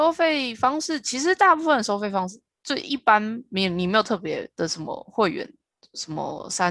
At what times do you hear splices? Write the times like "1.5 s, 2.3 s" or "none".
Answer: none